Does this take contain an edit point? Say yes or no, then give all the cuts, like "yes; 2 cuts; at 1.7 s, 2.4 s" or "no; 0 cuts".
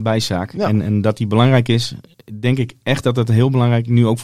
no; 0 cuts